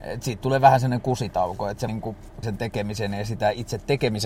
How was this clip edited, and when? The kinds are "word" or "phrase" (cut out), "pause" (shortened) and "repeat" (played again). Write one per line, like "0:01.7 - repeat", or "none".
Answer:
0:01.9 - word
0:02.4 - word